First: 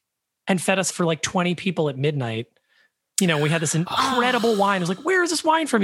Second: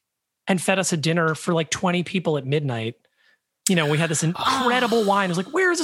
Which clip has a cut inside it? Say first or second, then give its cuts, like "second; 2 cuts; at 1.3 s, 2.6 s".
first; 1 cut; at 0.9 s